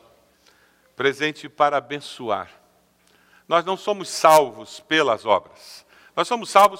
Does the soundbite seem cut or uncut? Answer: uncut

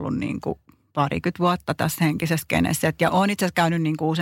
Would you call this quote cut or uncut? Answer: cut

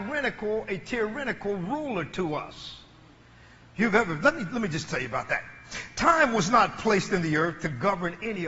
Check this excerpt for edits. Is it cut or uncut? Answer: uncut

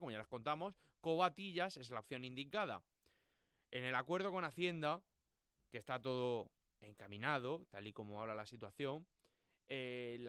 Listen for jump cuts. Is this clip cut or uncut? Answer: uncut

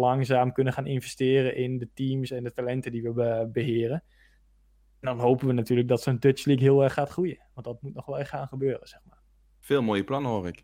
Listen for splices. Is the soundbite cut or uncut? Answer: uncut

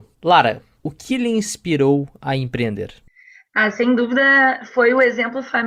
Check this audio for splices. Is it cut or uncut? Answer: uncut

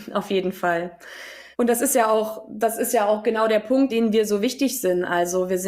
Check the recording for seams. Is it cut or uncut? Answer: cut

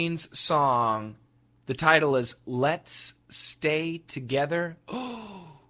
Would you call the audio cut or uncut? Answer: uncut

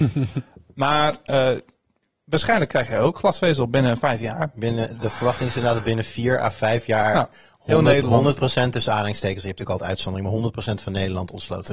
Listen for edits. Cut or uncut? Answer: uncut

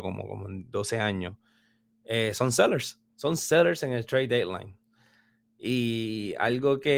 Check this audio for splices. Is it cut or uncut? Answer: cut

